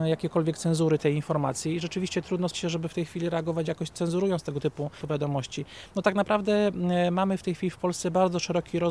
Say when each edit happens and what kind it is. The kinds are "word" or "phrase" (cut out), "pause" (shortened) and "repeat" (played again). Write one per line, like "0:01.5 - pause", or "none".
0:01.0 - word
0:02.5 - word
0:03.7 - word